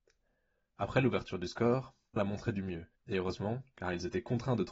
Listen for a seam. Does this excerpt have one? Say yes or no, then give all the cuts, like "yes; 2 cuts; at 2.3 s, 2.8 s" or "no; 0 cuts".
yes; 2 cuts; at 2.2 s, 3.0 s